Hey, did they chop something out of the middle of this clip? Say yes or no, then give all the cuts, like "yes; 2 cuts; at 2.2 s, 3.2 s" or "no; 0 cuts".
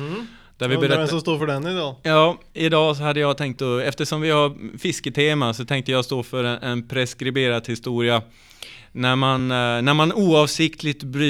no; 0 cuts